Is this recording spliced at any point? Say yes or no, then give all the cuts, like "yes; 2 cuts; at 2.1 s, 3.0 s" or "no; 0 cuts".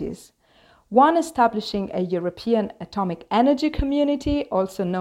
no; 0 cuts